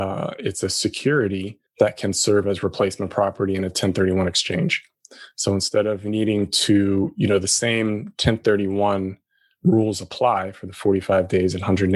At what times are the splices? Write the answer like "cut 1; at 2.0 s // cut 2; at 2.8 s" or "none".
none